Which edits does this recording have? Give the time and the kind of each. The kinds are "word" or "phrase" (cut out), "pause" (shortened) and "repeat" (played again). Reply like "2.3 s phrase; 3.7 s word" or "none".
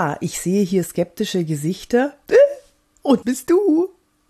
3.2 s word